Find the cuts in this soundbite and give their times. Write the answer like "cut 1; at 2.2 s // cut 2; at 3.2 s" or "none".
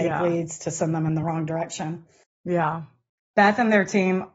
none